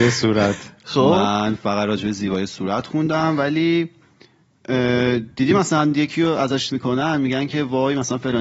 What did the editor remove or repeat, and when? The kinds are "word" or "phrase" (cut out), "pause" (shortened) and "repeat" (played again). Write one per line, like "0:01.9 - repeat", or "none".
0:06.7 - word

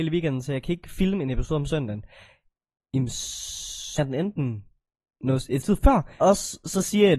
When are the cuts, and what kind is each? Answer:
0:04.0 - word
0:05.6 - word
0:06.2 - word

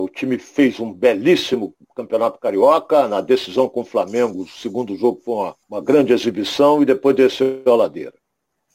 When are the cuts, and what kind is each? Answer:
0:05.6 - pause

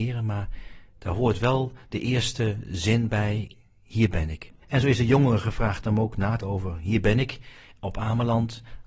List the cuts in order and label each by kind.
0:04.6 - pause
0:06.4 - word

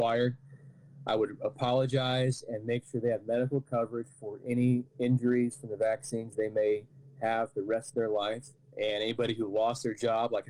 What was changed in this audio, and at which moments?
0:08.5 - pause

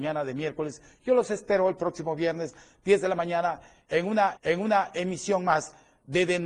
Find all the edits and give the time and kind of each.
0:04.4 - repeat

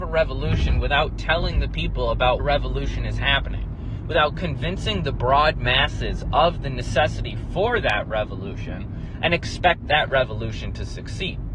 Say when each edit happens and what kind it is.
0:02.4 - phrase

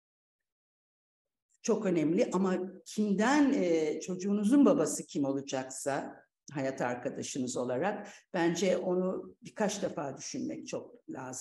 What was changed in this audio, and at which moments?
none

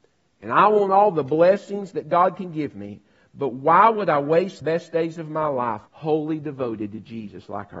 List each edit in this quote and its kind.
0:04.6 - word
0:05.9 - pause

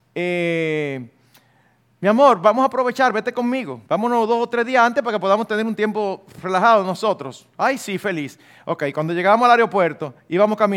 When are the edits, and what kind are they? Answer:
0:03.9 - pause

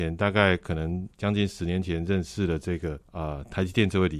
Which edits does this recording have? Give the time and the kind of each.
0:01.1 - pause
0:03.0 - pause

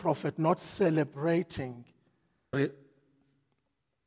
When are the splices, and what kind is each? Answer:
0:02.5 - word

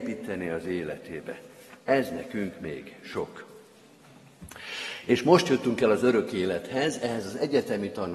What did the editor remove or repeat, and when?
none

